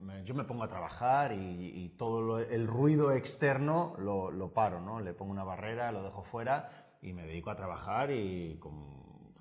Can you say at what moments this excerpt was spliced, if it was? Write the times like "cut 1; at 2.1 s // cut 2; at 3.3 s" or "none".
none